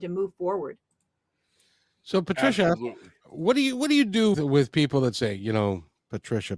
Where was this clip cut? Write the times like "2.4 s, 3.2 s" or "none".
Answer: 4.3 s